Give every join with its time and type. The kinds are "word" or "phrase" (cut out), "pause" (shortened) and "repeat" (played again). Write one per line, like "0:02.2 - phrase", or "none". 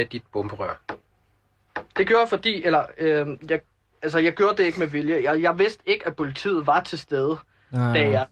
none